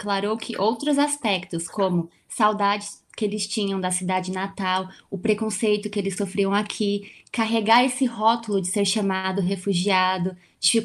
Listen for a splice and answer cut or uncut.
uncut